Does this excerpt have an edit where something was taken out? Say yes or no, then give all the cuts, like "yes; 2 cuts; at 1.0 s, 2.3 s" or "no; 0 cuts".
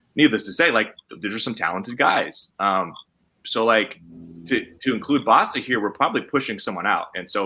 no; 0 cuts